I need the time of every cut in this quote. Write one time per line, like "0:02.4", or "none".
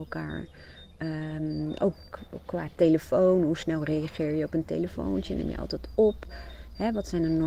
none

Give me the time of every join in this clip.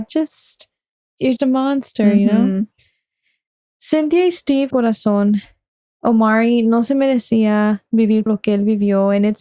0:01.4
0:04.7
0:08.3

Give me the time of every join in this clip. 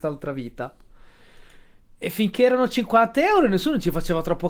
none

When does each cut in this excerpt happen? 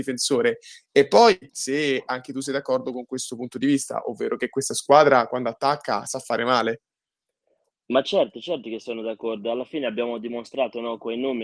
0:01.5

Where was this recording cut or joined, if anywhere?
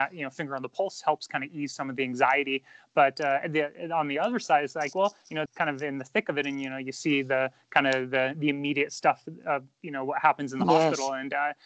0:05.5

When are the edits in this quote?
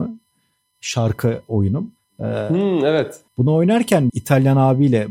0:02.0
0:03.3
0:04.1

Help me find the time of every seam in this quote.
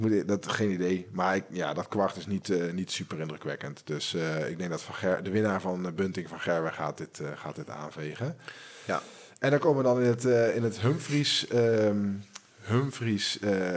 none

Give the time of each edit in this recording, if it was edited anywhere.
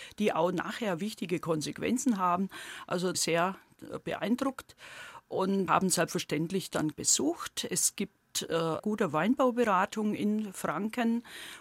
0:03.1
0:05.7
0:06.9
0:08.8

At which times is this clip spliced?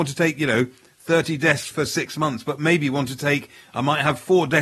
0:01.7

